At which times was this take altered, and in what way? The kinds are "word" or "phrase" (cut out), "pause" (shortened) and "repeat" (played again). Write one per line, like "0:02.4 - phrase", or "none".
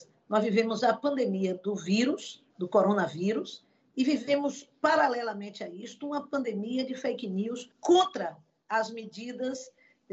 0:02.5 - pause
0:07.7 - pause

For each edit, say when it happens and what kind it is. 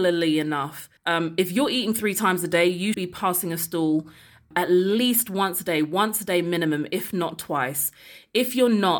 0:01.0 - pause
0:02.9 - word
0:04.5 - word

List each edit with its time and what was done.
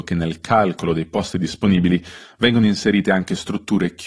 none

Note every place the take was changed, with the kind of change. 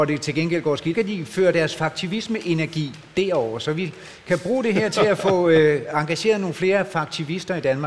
0:00.9 - word

